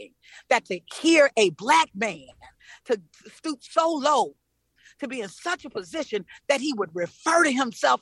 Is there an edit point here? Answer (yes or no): no